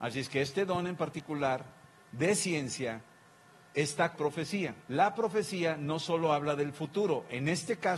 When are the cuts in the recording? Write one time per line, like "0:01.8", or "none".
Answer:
0:04.1
0:04.8